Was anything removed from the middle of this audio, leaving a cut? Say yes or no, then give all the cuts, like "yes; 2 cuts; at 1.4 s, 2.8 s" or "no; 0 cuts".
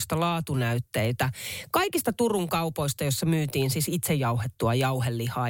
no; 0 cuts